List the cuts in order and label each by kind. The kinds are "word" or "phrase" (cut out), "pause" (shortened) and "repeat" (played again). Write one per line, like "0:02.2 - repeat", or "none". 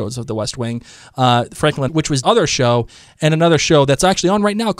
0:01.9 - phrase
0:02.2 - phrase